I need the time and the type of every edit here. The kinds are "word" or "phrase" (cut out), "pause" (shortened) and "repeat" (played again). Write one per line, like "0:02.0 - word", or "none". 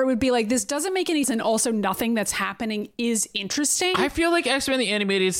0:01.2 - word